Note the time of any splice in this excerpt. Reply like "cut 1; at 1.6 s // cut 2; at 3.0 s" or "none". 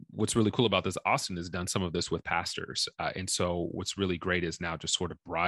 none